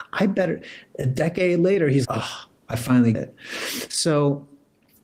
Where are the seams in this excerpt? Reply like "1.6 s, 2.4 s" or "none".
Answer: 2.0 s, 3.1 s